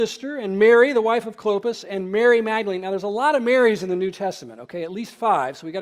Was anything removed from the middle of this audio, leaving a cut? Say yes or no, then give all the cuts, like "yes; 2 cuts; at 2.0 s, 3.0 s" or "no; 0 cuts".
no; 0 cuts